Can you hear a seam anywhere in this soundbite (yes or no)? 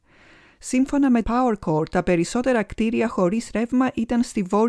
yes